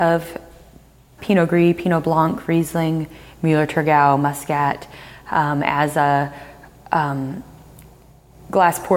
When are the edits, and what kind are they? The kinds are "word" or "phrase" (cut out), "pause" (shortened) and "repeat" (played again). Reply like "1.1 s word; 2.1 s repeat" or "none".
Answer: 1.2 s word